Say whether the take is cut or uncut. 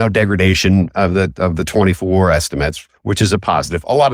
uncut